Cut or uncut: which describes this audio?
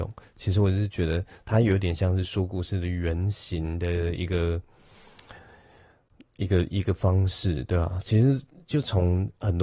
uncut